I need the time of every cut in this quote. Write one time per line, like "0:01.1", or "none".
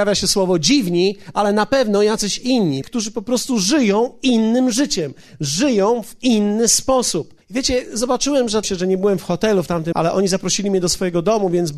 0:02.8
0:07.4
0:08.6
0:09.9

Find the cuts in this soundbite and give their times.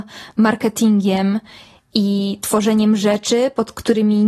none

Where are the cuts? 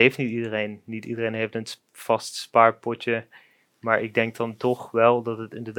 none

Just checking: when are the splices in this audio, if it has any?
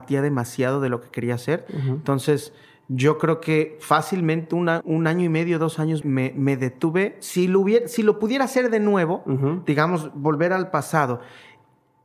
0:04.8
0:06.0

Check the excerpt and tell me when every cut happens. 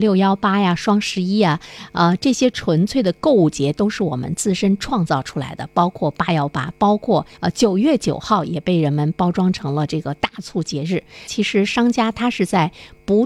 0:07.3

